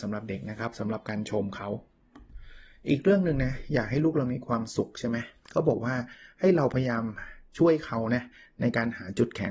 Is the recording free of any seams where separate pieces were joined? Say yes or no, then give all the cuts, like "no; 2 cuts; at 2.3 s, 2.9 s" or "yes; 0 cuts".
yes; 0 cuts